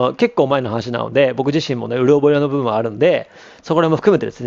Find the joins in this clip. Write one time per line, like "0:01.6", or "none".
none